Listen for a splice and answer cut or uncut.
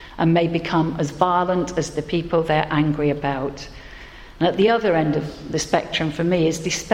uncut